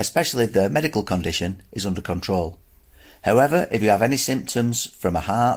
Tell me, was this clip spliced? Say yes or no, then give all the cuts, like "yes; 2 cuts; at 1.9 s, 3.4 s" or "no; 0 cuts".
no; 0 cuts